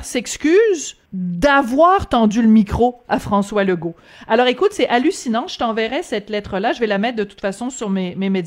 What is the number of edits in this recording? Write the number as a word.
one